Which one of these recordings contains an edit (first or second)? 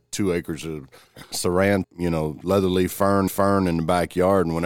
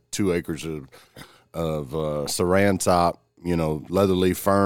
first